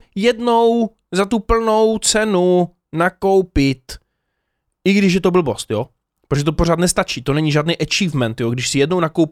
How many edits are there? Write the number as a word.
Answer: zero